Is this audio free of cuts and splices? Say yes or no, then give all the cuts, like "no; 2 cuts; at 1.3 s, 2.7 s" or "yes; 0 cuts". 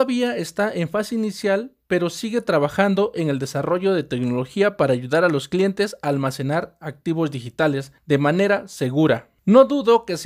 yes; 0 cuts